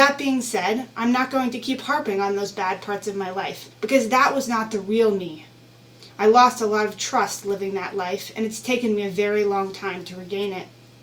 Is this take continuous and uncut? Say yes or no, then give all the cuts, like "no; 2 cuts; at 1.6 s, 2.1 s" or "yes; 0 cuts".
no; 2 cuts; at 3.7 s, 6.1 s